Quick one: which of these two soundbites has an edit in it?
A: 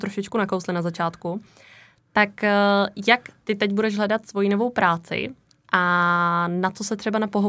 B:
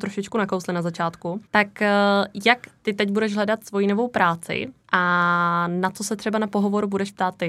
B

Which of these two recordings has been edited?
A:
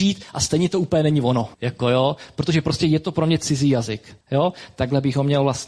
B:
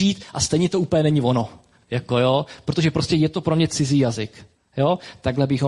A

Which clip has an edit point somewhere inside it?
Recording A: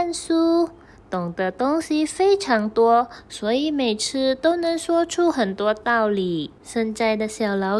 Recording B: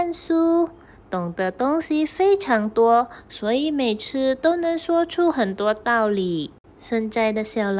A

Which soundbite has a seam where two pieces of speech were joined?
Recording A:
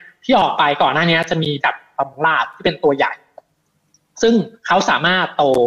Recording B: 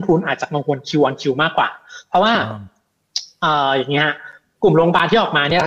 A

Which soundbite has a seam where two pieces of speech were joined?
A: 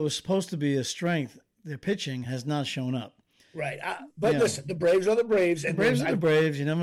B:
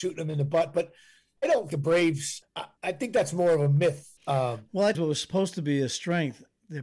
B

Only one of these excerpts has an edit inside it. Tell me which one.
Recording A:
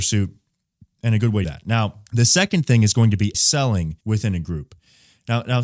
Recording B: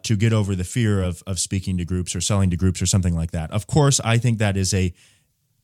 A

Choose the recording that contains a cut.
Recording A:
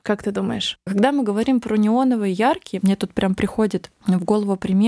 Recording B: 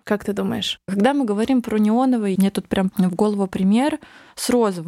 B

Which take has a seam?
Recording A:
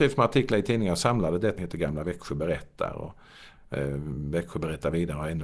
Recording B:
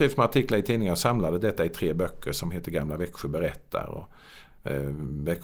A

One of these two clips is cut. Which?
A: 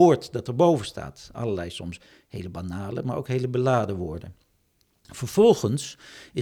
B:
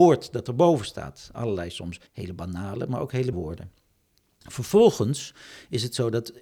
B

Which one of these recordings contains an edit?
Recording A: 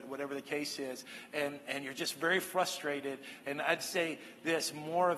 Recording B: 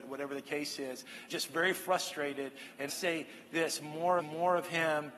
B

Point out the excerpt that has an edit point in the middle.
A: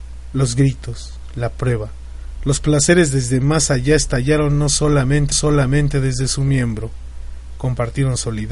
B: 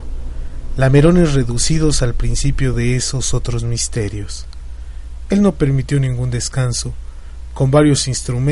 A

